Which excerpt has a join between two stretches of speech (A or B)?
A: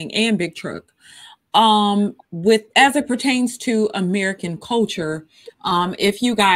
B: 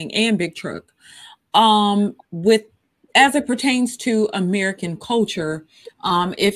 A